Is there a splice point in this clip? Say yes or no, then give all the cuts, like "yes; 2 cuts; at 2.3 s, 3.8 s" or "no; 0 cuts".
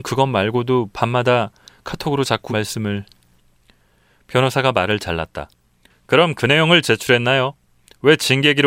yes; 2 cuts; at 2.5 s, 6.8 s